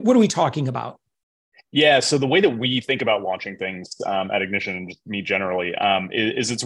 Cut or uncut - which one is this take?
uncut